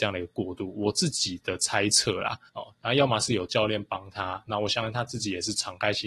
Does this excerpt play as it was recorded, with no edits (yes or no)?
no